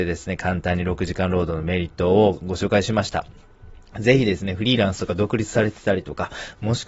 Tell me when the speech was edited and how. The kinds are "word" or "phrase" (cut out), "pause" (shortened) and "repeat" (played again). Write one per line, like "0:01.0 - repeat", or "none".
none